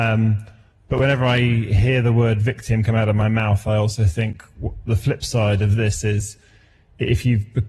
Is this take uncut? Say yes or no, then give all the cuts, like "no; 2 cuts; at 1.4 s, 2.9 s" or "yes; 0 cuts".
yes; 0 cuts